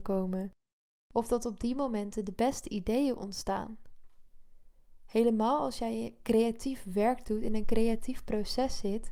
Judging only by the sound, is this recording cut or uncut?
uncut